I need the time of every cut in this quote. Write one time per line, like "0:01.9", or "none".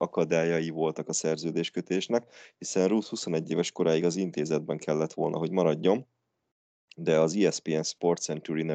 none

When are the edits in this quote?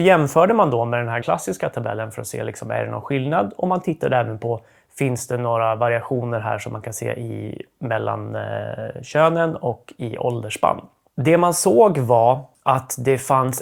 0:01.2

